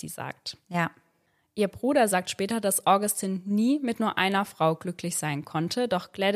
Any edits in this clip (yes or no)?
no